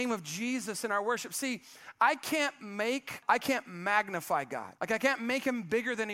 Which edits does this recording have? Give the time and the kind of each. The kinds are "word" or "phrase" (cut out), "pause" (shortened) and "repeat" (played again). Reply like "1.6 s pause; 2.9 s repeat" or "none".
3.2 s word; 4.8 s pause